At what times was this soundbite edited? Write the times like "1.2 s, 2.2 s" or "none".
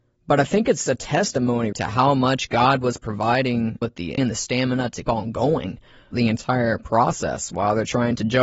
1.7 s, 3.8 s, 4.2 s, 5.1 s, 6.1 s